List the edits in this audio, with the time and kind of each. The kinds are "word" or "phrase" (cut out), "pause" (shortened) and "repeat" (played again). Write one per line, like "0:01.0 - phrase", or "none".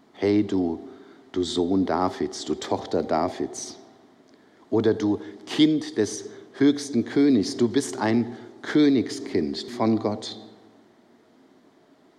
0:09.7 - phrase